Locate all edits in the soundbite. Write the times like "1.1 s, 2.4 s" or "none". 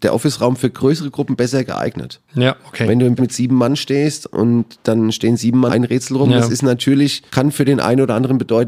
3.2 s, 5.7 s, 7.3 s